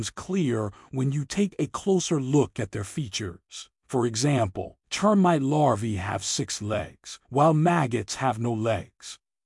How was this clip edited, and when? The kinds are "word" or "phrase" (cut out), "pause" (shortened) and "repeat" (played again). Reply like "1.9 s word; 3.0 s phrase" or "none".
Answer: 3.8 s pause; 4.8 s pause; 7.2 s pause